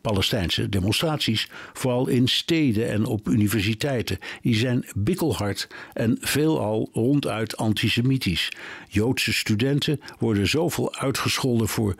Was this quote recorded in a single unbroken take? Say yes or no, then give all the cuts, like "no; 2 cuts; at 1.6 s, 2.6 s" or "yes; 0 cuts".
yes; 0 cuts